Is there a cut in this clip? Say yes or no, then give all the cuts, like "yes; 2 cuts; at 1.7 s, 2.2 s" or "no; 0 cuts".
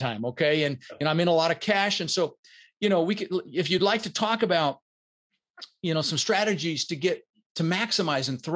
no; 0 cuts